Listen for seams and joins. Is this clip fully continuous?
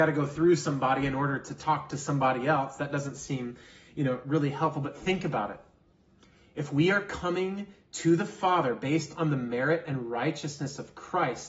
yes; 0 cuts

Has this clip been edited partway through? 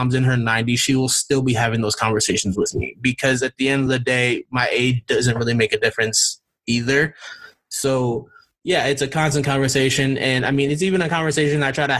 no; 0 cuts

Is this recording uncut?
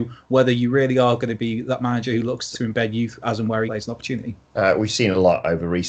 no; 3 cuts; at 2.5 s, 3.7 s, 4.4 s

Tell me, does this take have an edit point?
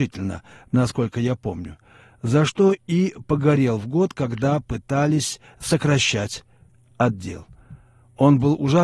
no; 0 cuts

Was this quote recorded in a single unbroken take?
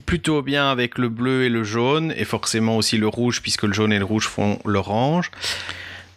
yes; 0 cuts

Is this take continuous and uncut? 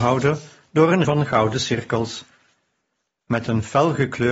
no; 1 cut; at 1.0 s

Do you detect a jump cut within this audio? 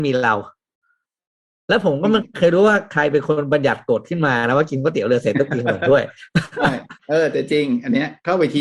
yes; 1 cut; at 7.0 s

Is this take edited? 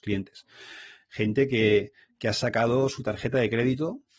no; 0 cuts

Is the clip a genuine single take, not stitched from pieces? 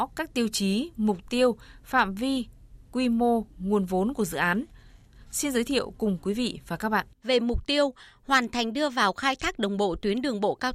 no; 2 cuts; at 3.5 s, 7.1 s

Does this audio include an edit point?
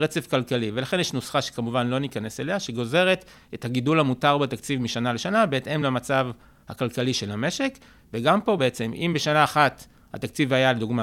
no; 0 cuts

